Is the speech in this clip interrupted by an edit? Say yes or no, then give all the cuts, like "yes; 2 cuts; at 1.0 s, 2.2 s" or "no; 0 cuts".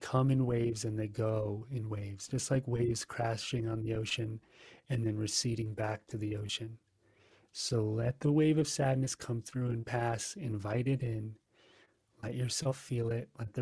no; 0 cuts